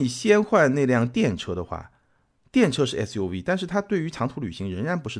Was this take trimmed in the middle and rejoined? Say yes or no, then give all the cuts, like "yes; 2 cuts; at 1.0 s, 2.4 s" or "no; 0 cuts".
no; 0 cuts